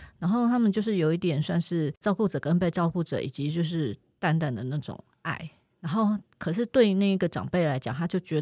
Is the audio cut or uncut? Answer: uncut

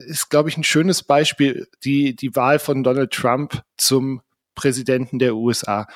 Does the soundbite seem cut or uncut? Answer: uncut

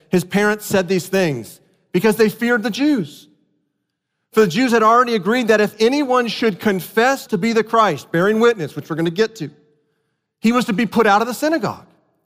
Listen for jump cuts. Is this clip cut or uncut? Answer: cut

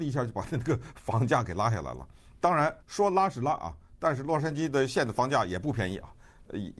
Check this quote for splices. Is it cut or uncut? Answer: cut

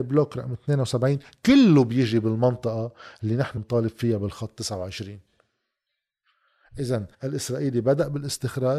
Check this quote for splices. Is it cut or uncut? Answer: cut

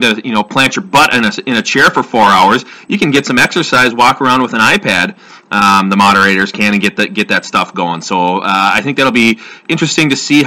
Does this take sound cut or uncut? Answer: uncut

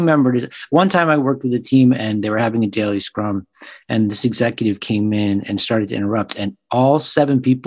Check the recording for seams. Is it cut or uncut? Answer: uncut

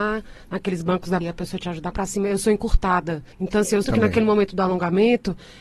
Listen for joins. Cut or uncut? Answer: cut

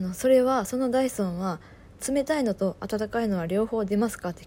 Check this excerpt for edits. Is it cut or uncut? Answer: uncut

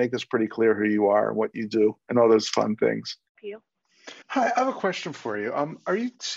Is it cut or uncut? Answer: cut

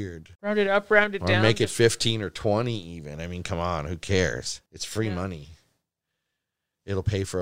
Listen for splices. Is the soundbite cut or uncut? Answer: cut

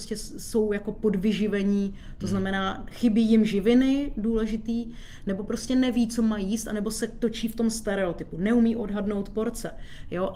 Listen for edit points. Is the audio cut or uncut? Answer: uncut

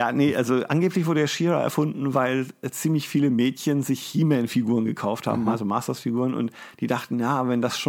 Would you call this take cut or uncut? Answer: uncut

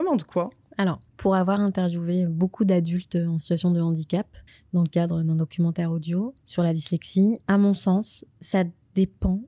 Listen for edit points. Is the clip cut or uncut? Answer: cut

